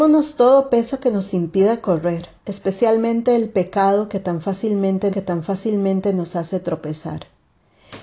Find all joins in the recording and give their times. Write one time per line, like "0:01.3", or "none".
0:02.4
0:05.1